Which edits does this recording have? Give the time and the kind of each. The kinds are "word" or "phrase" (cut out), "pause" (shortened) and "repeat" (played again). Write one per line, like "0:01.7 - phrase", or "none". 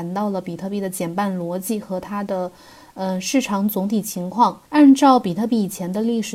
0:04.6 - pause